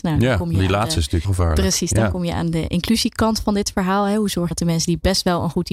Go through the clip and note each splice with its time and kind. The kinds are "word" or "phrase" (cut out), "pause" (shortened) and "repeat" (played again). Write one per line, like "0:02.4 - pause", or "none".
0:01.2 - word
0:04.5 - word